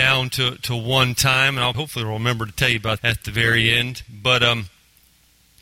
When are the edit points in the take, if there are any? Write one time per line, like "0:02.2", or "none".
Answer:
0:01.7
0:03.0